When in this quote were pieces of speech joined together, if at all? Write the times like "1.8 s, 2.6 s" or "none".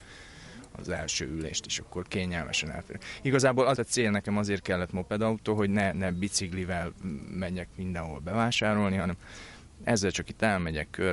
3.8 s